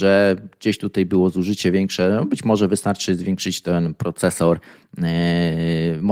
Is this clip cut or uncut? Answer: uncut